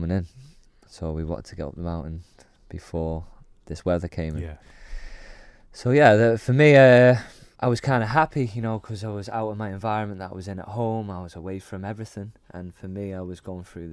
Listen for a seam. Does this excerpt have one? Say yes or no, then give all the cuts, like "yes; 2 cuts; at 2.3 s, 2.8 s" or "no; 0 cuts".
yes; 2 cuts; at 3.6 s, 7.5 s